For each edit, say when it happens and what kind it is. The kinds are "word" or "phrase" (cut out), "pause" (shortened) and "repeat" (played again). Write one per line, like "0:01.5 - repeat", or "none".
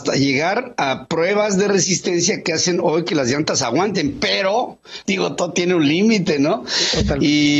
0:05.1 - word